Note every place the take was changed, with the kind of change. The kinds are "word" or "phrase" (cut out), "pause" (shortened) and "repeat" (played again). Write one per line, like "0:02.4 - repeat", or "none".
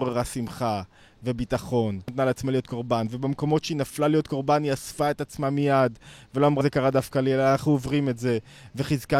0:02.1 - word
0:06.6 - word